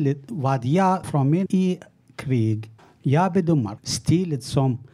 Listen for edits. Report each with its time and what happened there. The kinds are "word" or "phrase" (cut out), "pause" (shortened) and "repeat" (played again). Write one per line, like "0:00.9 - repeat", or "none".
0:01.0 - word
0:01.5 - word
0:02.8 - pause
0:03.8 - word